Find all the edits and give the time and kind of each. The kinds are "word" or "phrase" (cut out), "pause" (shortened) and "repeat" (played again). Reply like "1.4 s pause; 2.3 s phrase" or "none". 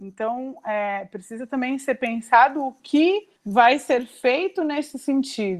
3.3 s pause